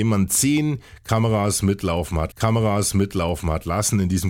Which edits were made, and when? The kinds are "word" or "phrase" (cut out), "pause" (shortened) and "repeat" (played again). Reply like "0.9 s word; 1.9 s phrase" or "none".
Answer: 2.3 s repeat

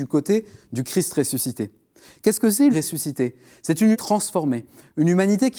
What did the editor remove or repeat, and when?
2.7 s word; 3.9 s word

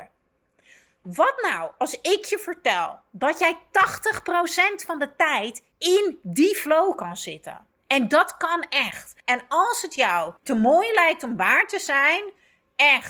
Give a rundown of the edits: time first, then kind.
5.7 s pause; 9.2 s pause; 10.4 s pause

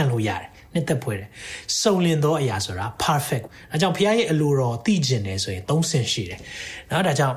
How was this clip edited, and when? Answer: 3.5 s word

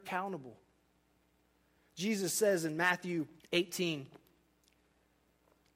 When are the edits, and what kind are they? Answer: 3.4 s pause

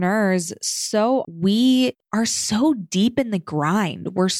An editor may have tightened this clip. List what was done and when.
1.2 s word; 2.0 s pause

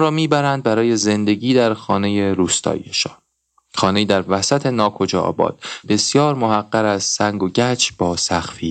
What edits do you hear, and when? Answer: 5.8 s word

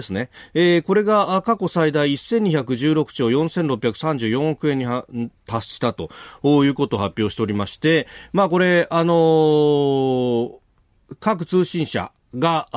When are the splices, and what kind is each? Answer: none

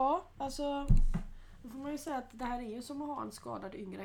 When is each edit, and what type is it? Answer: none

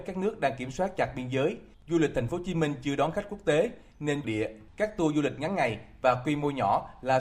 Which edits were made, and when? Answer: 4.2 s phrase

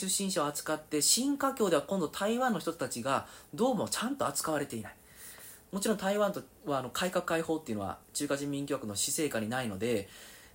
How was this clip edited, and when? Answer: 6.5 s pause; 8.0 s pause

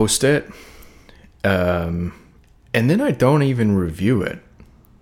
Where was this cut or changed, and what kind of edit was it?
none

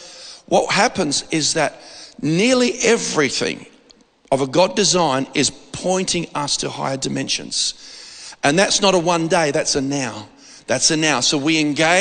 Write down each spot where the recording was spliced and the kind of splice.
none

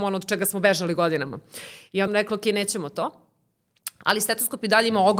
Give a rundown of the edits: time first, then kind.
2.1 s word

